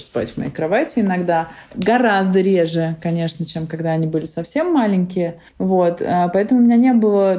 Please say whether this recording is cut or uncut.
cut